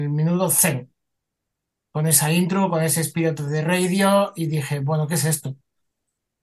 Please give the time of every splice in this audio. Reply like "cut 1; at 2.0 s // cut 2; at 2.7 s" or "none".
none

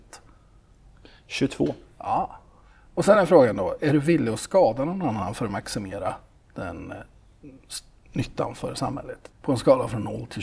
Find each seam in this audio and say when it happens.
none

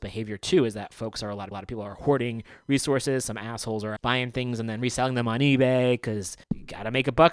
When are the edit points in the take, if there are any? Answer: cut 1; at 1.5 s // cut 2; at 4.0 s // cut 3; at 6.4 s

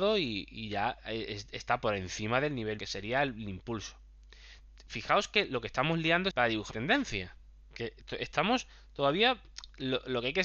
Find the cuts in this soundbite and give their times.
cut 1; at 2.8 s // cut 2; at 6.3 s // cut 3; at 6.7 s

